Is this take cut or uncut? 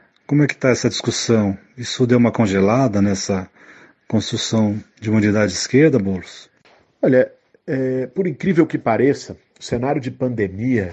uncut